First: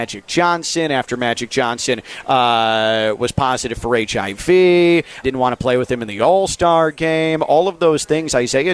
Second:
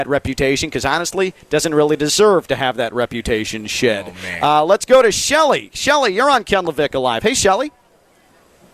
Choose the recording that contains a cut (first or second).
first